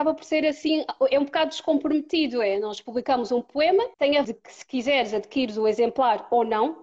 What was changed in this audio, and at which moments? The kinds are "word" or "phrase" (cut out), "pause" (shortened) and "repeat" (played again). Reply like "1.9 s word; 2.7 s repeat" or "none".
3.9 s pause; 4.2 s word